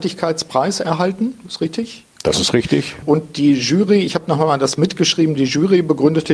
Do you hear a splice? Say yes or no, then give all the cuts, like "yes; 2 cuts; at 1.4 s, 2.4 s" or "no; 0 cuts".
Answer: no; 0 cuts